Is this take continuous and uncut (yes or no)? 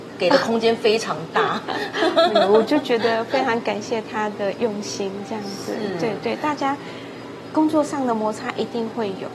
yes